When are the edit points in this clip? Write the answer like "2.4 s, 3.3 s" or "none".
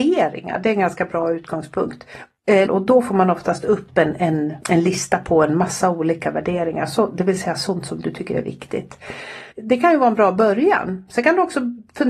2.7 s, 4.6 s, 9.5 s